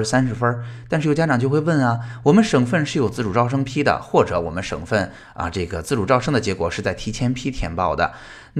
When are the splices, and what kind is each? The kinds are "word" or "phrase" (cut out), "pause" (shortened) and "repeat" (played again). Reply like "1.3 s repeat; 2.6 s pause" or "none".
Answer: none